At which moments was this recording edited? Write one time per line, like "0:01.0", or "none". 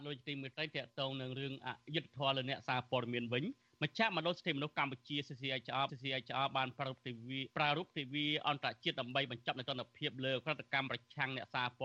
0:05.9
0:07.5